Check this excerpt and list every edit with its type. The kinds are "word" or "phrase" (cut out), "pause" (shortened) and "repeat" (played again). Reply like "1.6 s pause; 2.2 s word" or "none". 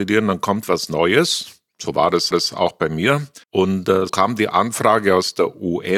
2.3 s repeat; 3.4 s pause; 4.1 s word